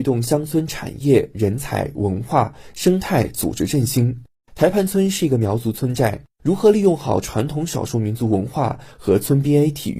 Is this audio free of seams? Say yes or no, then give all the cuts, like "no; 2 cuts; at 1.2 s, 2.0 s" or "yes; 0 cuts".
yes; 0 cuts